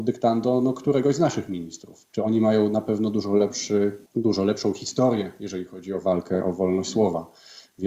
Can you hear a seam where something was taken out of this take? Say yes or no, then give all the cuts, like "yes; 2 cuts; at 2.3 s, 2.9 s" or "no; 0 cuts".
yes; 2 cuts; at 2.1 s, 4.1 s